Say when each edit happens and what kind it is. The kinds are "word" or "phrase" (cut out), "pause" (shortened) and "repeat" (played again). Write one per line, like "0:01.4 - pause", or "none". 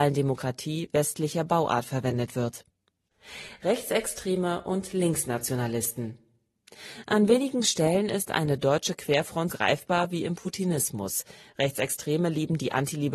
0:09.5 - word